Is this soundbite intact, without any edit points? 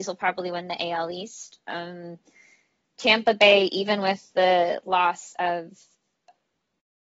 yes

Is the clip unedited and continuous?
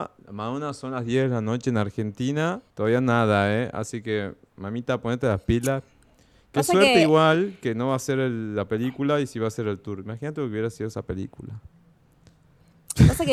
no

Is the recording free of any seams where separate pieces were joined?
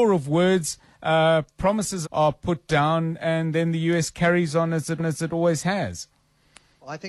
no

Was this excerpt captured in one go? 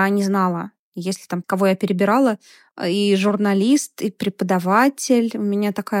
no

